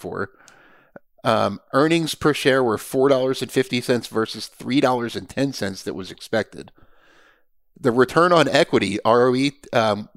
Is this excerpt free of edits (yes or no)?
yes